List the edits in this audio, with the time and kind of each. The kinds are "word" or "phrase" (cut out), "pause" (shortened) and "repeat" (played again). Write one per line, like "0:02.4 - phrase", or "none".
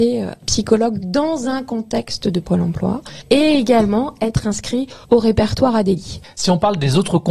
0:02.4 - word
0:05.0 - pause